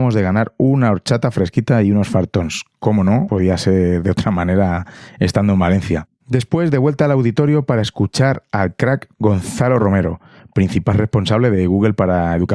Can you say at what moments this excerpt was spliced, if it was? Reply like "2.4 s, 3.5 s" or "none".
none